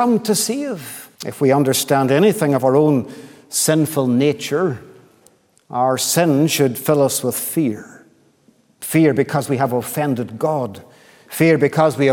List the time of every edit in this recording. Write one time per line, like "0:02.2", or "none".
0:01.1